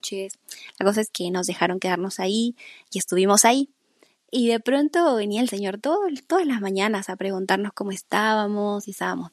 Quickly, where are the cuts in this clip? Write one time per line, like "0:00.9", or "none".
none